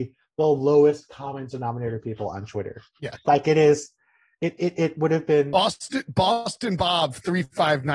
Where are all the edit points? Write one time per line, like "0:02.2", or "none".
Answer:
none